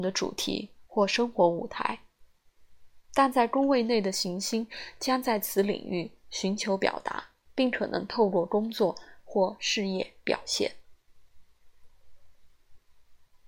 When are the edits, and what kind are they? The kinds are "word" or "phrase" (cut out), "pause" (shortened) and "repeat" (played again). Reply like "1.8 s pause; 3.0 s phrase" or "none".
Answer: 7.5 s pause